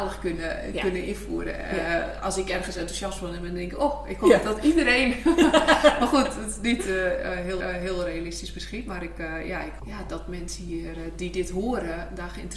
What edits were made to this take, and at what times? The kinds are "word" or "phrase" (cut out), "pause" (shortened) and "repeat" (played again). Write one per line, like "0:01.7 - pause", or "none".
0:07.6 - repeat
0:09.8 - word

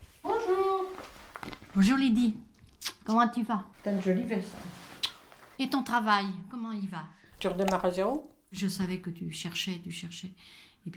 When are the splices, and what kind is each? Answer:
0:03.0 - pause
0:03.7 - pause
0:05.5 - pause
0:07.4 - word

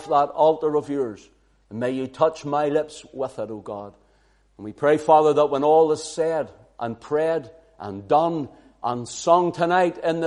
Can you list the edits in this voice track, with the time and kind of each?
none

